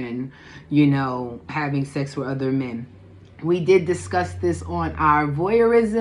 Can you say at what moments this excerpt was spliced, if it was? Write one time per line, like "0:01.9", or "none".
none

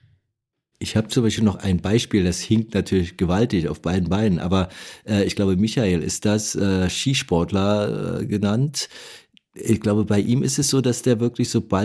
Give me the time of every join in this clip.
none

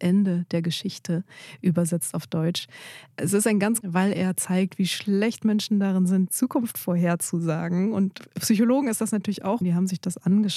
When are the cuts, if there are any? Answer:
0:03.8
0:06.3
0:09.6

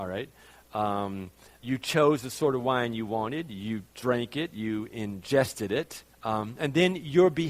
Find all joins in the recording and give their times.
0:01.6
0:03.9
0:06.1

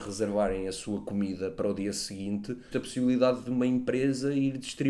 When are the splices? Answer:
0:02.7

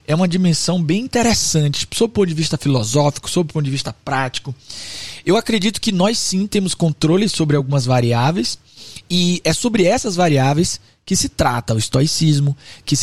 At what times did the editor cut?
none

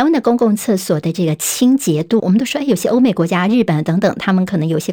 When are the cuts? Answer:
0:02.2

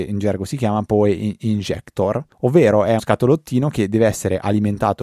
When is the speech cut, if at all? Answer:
0:02.3
0:03.0

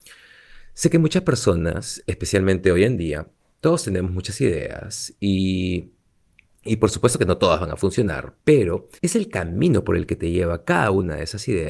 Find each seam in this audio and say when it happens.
0:09.0

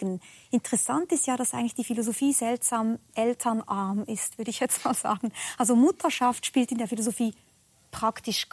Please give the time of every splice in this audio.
none

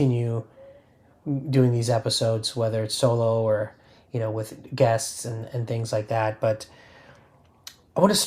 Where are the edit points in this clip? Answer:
none

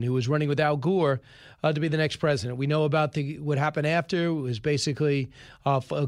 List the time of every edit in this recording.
none

